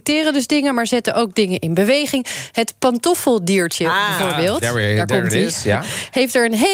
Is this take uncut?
yes; 0 cuts

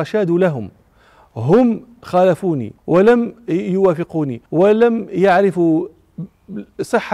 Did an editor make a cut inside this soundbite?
yes; 2 cuts; at 2.8 s, 4.5 s

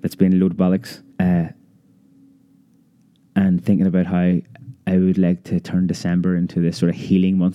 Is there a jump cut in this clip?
yes; 1 cut; at 1.1 s

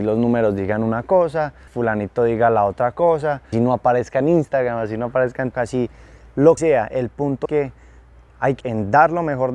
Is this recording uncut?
no; 6 cuts; at 1.7 s, 3.5 s, 5.5 s, 6.6 s, 7.4 s, 8.6 s

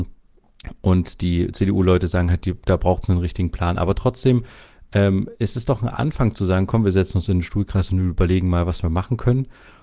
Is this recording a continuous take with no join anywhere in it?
yes; 0 cuts

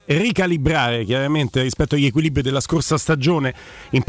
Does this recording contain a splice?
no; 0 cuts

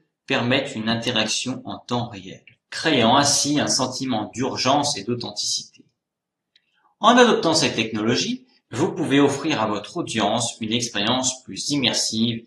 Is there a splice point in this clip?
no; 0 cuts

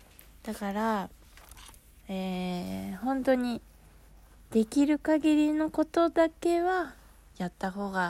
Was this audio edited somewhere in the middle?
no; 0 cuts

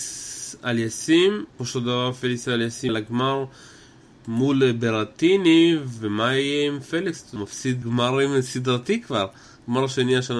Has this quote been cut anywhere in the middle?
yes; 4 cuts; at 1.6 s, 2.9 s, 7.4 s, 7.8 s

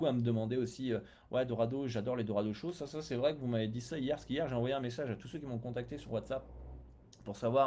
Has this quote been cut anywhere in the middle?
no; 0 cuts

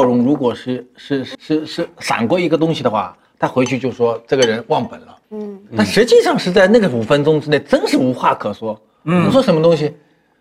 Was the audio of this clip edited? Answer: yes; 2 cuts; at 1.3 s, 5.2 s

